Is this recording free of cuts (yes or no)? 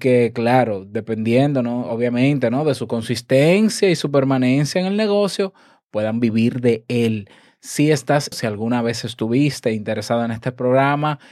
no